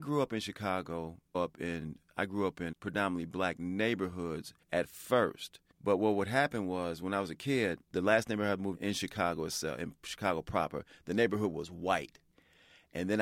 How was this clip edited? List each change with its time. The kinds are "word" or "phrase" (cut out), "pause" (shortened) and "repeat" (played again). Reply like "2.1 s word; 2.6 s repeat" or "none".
1.3 s phrase; 2.7 s word; 4.6 s pause; 5.7 s pause; 7.8 s pause; 8.7 s phrase